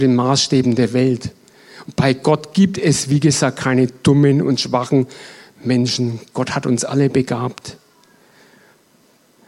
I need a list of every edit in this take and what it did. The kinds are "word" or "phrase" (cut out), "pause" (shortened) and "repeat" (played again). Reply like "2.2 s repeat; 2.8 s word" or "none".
none

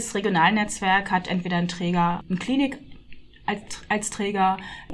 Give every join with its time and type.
none

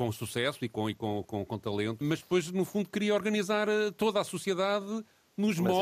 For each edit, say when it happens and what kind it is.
2.0 s word

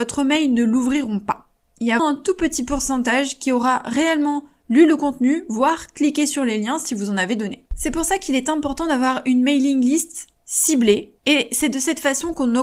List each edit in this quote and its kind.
2.0 s word; 7.7 s pause; 11.2 s pause

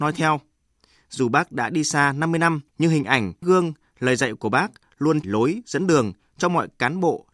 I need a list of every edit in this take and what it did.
2.7 s pause; 3.4 s word; 5.2 s word

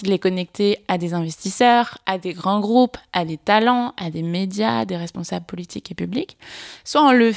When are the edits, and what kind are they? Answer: none

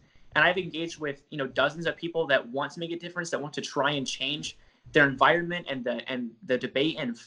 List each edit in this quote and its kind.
none

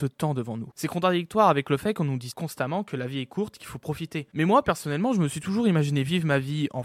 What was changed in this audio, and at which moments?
none

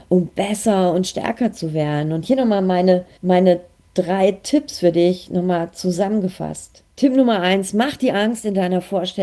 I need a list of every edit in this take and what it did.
3.2 s pause; 6.9 s pause

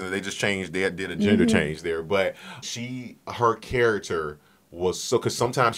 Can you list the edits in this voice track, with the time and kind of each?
2.6 s word

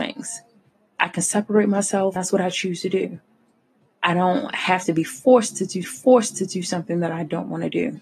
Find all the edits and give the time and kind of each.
2.2 s word; 3.5 s pause; 5.8 s repeat

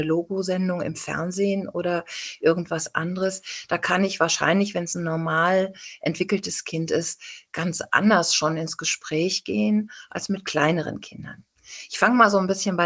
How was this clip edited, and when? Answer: none

